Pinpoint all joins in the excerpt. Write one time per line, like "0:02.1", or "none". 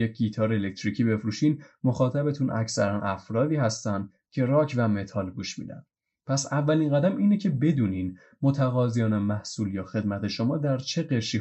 none

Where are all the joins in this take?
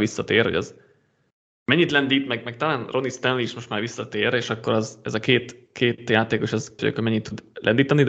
0:06.8

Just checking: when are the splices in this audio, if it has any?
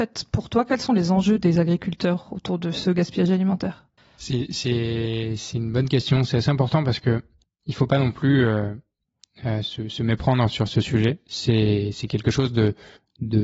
none

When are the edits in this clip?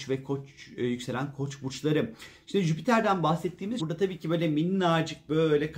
0:03.8

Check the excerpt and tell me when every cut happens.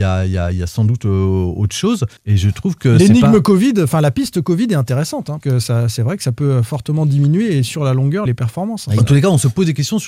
0:02.2
0:05.4
0:08.3

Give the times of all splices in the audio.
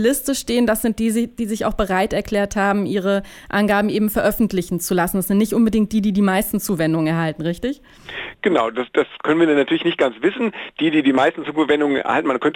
none

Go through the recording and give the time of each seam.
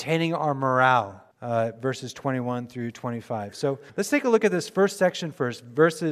0:01.3
0:03.9

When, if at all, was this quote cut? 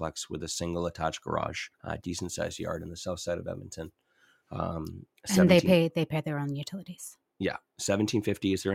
0:01.7

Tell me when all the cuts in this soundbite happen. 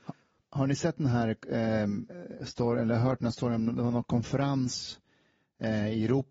none

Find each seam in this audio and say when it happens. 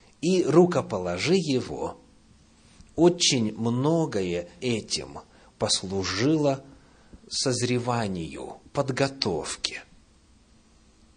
0:04.6
0:07.2

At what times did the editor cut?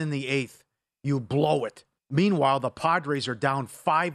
0:02.0

